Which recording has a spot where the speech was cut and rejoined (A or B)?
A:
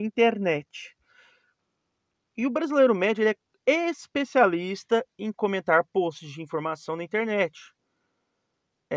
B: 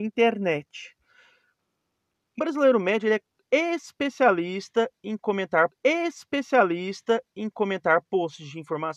B